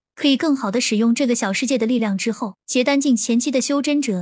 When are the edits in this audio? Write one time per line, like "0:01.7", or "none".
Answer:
0:02.6